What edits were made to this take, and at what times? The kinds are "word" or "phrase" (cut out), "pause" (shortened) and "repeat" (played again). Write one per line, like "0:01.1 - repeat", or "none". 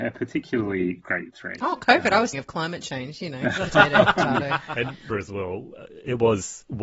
0:02.3 - word
0:05.1 - word